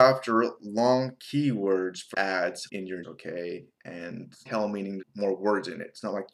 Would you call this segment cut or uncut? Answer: cut